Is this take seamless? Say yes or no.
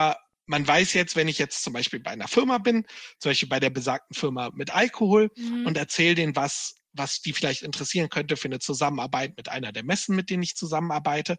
yes